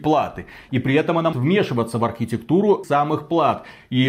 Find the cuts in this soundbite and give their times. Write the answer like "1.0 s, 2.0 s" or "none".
1.3 s, 2.8 s